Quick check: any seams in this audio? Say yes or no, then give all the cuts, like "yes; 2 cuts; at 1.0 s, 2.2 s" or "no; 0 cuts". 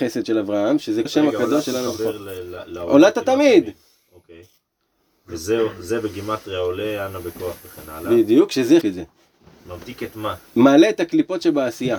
yes; 3 cuts; at 1.1 s, 8.8 s, 10.5 s